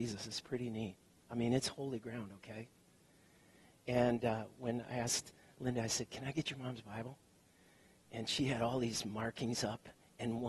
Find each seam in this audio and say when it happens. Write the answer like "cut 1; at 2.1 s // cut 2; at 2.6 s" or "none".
none